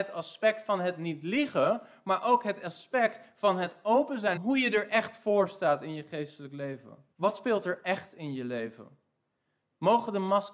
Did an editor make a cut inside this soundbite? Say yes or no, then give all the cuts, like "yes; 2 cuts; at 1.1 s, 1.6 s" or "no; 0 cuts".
yes; 2 cuts; at 4.4 s, 7.1 s